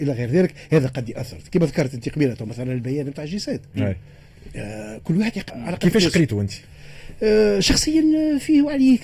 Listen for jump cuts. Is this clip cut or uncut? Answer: cut